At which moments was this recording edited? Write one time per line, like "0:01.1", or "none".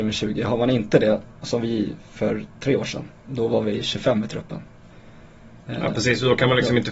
0:05.6